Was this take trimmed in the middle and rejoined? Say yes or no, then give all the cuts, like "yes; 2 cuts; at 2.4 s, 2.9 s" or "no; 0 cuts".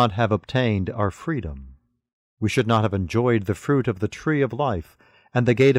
no; 0 cuts